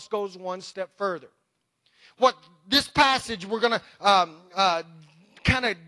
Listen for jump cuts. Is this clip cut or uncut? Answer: uncut